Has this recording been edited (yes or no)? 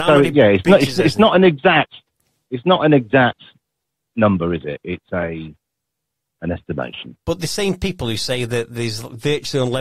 no